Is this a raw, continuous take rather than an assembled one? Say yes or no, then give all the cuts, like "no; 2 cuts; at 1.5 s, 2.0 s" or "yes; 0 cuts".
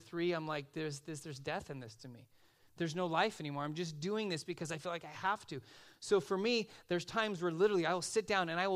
yes; 0 cuts